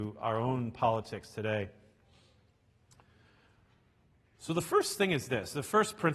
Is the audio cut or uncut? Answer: uncut